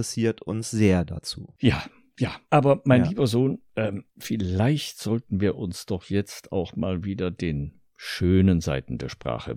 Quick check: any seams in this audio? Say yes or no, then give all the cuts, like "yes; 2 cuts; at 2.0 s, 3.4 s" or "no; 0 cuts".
yes; 2 cuts; at 2.4 s, 4.1 s